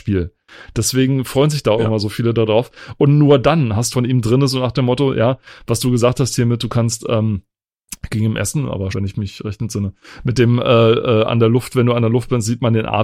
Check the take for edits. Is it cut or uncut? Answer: cut